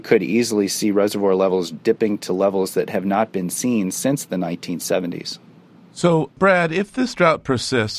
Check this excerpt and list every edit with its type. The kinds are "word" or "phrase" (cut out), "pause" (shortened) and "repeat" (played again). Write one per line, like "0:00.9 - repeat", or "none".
0:06.3 - pause